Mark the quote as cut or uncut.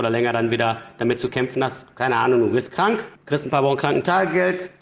cut